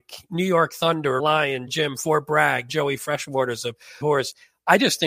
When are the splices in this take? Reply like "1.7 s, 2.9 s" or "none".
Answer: 1.2 s, 1.7 s, 2.7 s, 4.0 s